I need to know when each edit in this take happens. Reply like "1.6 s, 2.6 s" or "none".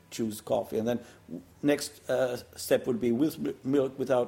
1.5 s